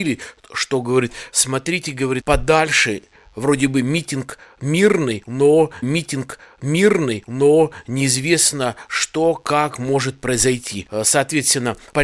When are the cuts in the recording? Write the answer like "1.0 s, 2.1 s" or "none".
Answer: 2.2 s, 5.8 s